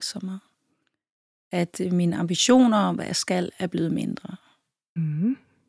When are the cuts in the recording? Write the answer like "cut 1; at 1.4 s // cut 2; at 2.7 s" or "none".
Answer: none

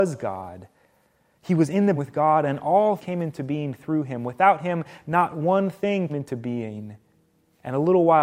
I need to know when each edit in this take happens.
cut 1; at 2.0 s // cut 2; at 3.0 s // cut 3; at 6.1 s

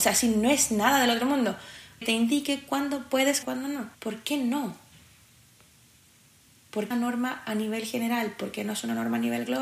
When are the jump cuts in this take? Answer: cut 1; at 2.0 s // cut 2; at 3.4 s // cut 3; at 3.9 s // cut 4; at 6.9 s

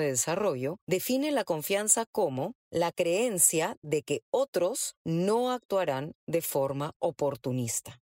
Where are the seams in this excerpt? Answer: none

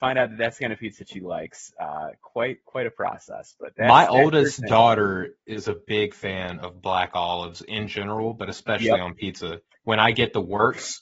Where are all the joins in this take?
none

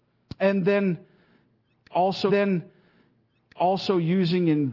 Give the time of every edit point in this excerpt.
cut 1; at 2.3 s

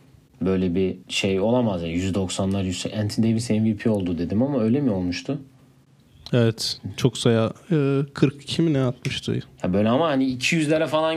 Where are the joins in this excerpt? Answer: cut 1; at 1.0 s

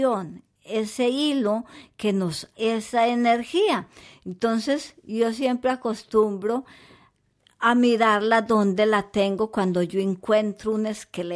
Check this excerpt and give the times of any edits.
cut 1; at 2.5 s

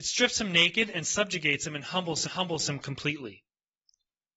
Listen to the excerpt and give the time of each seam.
cut 1; at 2.2 s

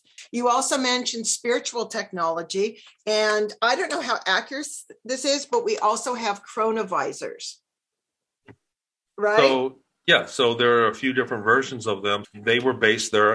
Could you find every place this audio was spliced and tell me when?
cut 1; at 12.2 s

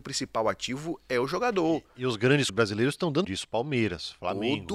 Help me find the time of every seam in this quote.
cut 1; at 2.5 s // cut 2; at 3.2 s

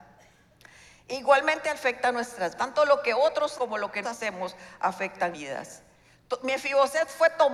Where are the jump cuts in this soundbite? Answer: cut 1; at 2.5 s // cut 2; at 3.5 s // cut 3; at 4.0 s // cut 4; at 5.3 s

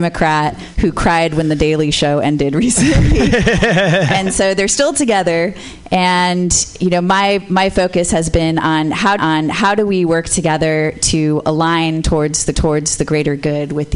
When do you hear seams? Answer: cut 1; at 9.2 s // cut 2; at 12.5 s

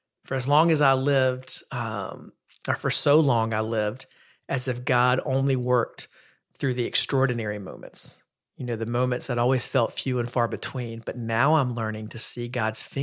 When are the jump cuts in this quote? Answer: none

